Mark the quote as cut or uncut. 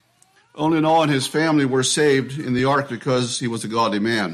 uncut